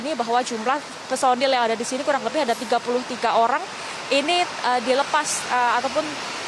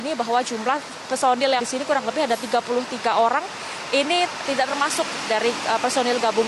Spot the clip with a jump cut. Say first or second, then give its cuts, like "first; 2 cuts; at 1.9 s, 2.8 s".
second; 2 cuts; at 1.6 s, 4.4 s